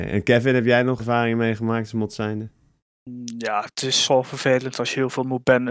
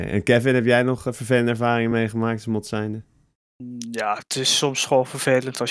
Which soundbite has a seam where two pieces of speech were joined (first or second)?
first